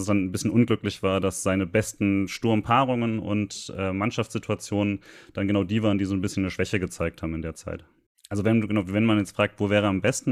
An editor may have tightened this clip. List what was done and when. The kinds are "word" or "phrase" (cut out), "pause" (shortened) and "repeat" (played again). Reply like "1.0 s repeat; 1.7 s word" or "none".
none